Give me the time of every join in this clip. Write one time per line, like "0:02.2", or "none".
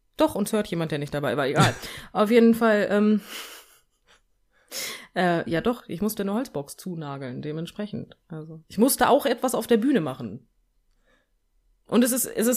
0:08.2